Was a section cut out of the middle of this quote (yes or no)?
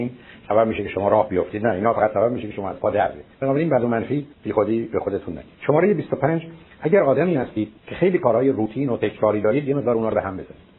yes